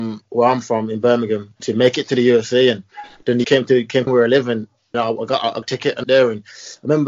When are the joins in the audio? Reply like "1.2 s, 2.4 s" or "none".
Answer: 1.6 s, 3.4 s, 4.1 s, 4.9 s, 5.6 s, 6.0 s